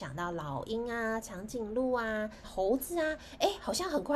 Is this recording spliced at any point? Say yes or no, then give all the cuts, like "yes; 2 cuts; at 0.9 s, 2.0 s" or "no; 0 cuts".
yes; 1 cut; at 2.4 s